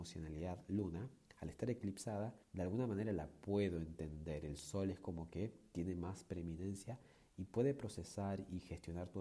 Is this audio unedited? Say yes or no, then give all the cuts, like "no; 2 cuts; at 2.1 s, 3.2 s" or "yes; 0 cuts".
no; 1 cut; at 2.4 s